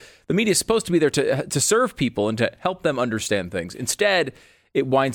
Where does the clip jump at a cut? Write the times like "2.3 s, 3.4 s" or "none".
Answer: none